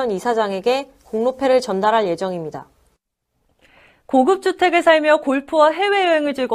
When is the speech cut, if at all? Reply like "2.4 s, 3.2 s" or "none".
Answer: none